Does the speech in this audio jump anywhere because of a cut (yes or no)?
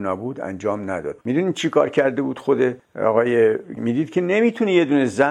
yes